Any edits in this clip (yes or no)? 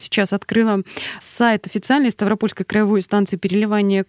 yes